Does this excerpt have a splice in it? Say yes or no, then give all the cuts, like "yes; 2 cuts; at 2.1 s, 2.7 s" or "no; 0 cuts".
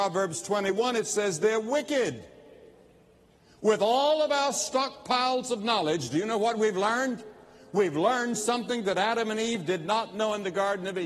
no; 0 cuts